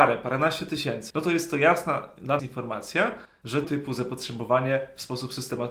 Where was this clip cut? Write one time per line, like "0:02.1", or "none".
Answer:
0:01.1
0:02.4
0:03.6